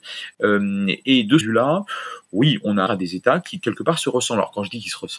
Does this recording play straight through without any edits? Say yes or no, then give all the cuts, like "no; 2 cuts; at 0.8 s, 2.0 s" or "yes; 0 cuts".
no; 2 cuts; at 1.4 s, 2.9 s